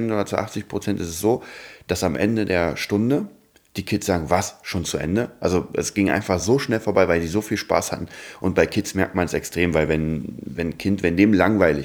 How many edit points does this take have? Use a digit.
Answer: 0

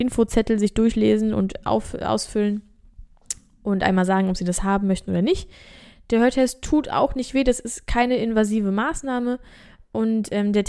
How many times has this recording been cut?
0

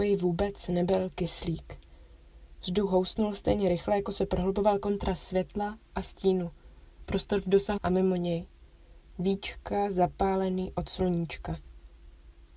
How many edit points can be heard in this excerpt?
1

